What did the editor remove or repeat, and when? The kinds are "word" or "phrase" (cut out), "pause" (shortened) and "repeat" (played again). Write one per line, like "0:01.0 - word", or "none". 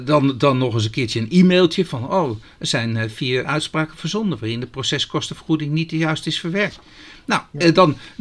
0:03.4 - word